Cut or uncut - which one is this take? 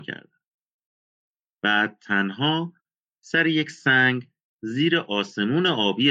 uncut